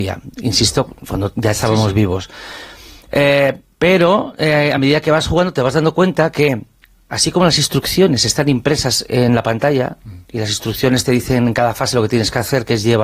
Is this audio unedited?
yes; 0 cuts

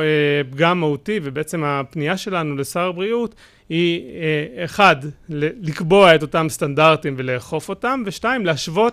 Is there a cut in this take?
no; 0 cuts

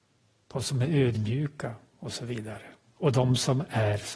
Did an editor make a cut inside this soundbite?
no; 0 cuts

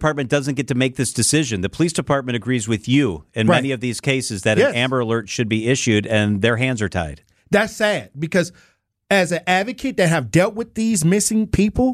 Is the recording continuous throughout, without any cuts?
yes; 0 cuts

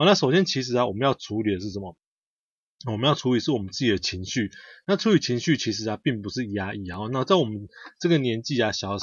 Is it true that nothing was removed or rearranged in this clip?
yes; 0 cuts

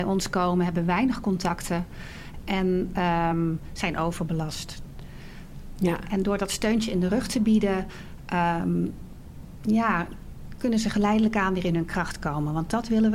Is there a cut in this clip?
no; 0 cuts

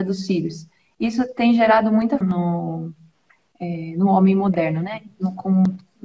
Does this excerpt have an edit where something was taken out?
yes; 1 cut; at 2.2 s

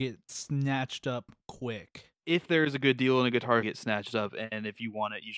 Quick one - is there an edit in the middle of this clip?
yes; 2 cuts; at 2.2 s, 3.6 s

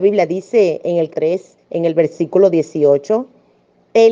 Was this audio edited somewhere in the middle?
yes; 2 cuts; at 1.1 s, 1.6 s

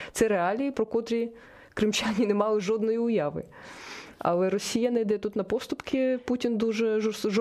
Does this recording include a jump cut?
no; 0 cuts

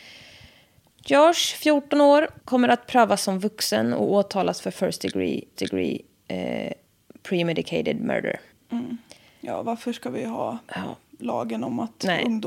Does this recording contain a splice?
yes; 3 cuts; at 2.4 s, 5.6 s, 8.5 s

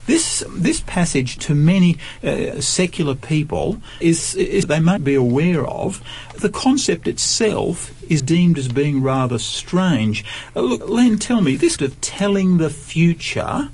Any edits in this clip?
yes; 9 cuts; at 1.4 s, 2.5 s, 4.0 s, 4.6 s, 5.0 s, 6.3 s, 8.2 s, 10.8 s, 11.8 s

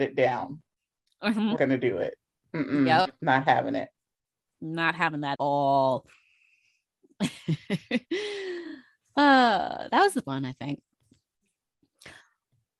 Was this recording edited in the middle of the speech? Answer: yes; 3 cuts; at 1.6 s, 5.3 s, 10.2 s

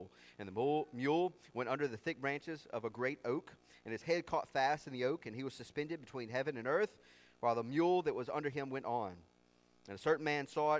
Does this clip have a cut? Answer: no; 0 cuts

